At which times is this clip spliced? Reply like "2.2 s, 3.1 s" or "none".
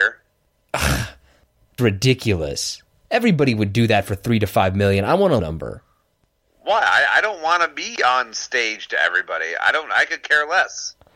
1.8 s, 5.4 s